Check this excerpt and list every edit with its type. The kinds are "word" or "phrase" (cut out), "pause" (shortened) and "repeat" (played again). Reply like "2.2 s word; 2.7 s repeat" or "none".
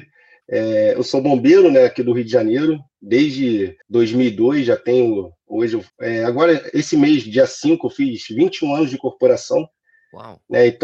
3.8 s pause; 5.9 s pause